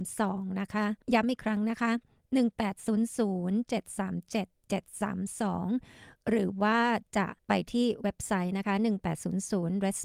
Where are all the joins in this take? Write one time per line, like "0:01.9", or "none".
0:01.0
0:07.4